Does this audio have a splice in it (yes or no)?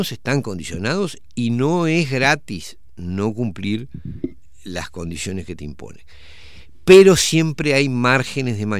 no